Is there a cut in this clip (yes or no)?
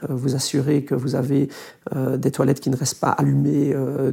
no